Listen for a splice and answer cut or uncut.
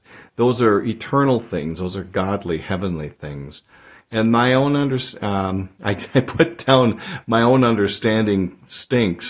uncut